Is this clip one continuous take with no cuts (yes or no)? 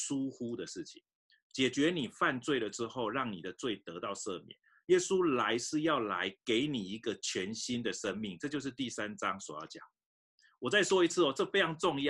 yes